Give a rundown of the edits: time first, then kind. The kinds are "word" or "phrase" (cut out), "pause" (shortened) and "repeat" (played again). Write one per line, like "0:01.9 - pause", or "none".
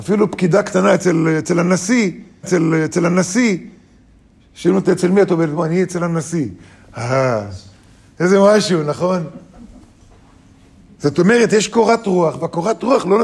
0:02.4 - repeat